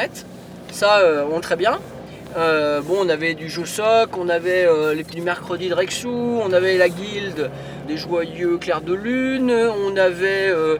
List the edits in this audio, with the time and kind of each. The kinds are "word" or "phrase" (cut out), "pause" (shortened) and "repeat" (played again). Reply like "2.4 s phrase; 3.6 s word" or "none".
1.4 s phrase; 5.1 s word; 7.8 s word

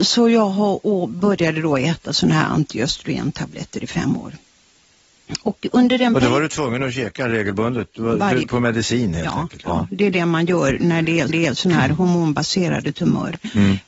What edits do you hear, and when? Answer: 8.4 s phrase; 11.3 s repeat

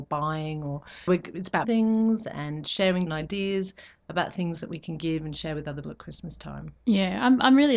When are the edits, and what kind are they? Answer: 1.1 s word; 1.6 s word; 3.1 s word; 5.8 s word

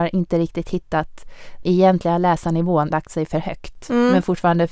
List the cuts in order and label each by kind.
1.6 s word; 2.9 s word

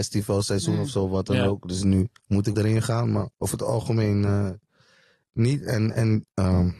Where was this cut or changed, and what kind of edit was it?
2.2 s pause; 2.5 s phrase; 3.3 s pause

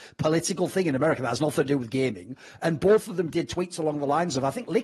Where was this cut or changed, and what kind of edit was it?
none

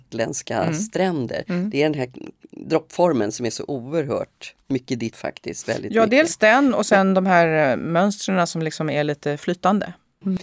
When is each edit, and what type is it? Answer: 5.1 s word

